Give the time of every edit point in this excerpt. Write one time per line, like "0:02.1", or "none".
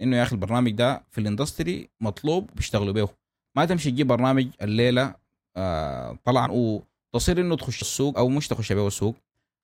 0:06.5
0:07.8
0:08.1